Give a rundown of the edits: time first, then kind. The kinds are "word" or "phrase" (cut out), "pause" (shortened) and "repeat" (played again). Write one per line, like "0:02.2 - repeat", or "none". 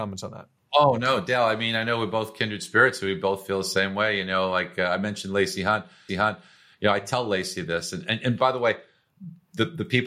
0:06.1 - repeat